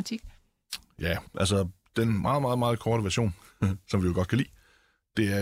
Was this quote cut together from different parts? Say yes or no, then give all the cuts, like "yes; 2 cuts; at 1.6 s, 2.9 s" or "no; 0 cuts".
no; 0 cuts